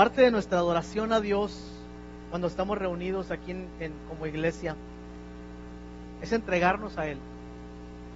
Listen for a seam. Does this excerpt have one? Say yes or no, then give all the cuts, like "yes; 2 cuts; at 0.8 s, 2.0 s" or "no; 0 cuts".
no; 0 cuts